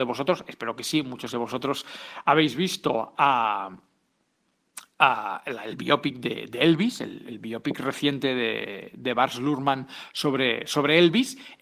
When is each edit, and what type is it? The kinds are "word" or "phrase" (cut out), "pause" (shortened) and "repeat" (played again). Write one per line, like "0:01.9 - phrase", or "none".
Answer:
none